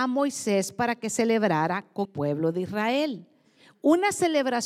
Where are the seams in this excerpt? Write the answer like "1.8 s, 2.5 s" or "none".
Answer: 2.0 s